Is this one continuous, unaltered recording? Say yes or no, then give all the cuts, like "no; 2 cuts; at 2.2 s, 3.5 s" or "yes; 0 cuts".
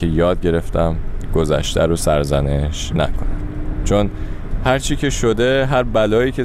yes; 0 cuts